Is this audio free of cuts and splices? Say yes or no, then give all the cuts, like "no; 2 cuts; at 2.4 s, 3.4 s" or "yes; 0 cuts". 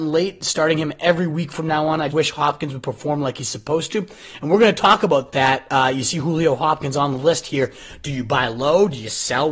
no; 1 cut; at 2.1 s